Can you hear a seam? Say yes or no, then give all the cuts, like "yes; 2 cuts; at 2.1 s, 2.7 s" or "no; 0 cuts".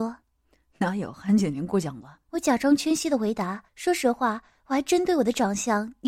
yes; 2 cuts; at 2.2 s, 3.7 s